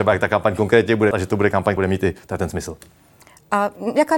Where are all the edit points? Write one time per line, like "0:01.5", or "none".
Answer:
0:01.1
0:01.8